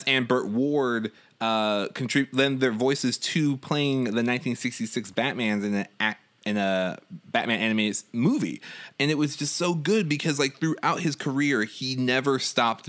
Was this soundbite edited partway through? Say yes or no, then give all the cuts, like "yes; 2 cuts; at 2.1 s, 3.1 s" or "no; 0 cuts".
no; 0 cuts